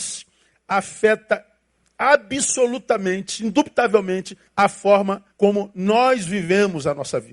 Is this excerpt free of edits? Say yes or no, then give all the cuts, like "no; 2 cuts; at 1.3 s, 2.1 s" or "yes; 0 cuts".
no; 3 cuts; at 1.7 s, 4.5 s, 5.3 s